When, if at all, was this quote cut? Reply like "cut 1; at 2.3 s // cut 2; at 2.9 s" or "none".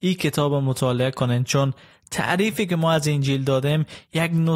none